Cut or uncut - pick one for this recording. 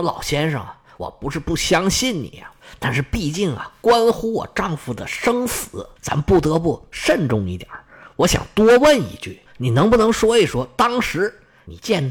cut